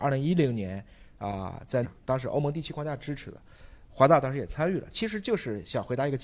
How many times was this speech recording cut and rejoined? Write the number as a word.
one